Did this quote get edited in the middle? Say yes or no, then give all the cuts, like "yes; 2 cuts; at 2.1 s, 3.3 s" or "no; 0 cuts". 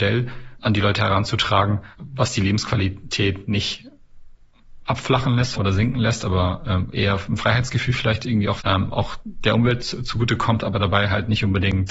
yes; 3 cuts; at 1.9 s, 5.5 s, 8.6 s